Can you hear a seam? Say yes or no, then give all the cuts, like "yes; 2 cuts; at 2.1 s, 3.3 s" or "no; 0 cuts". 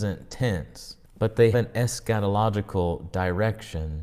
yes; 2 cuts; at 1.0 s, 1.5 s